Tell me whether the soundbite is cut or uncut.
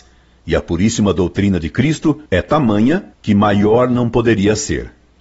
cut